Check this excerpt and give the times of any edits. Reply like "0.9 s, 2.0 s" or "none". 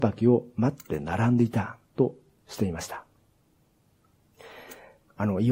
1.8 s